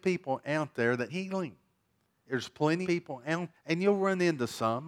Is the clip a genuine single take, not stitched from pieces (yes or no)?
no